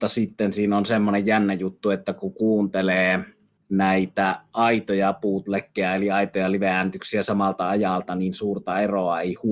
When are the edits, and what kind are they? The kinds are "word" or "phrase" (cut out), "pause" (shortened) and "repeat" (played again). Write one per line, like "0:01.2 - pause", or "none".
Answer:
none